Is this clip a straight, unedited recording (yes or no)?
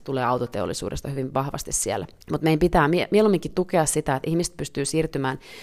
no